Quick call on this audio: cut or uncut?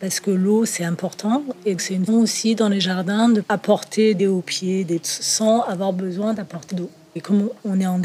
cut